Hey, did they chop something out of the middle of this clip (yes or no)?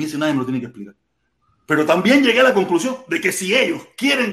no